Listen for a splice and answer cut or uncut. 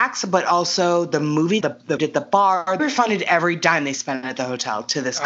cut